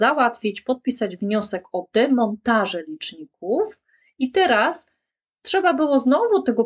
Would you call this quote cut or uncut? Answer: uncut